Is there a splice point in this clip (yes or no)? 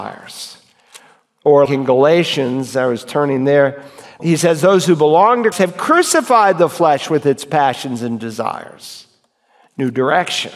yes